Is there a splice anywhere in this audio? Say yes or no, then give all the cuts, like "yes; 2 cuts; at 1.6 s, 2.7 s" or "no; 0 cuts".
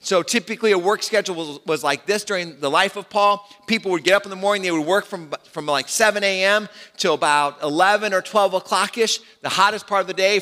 no; 0 cuts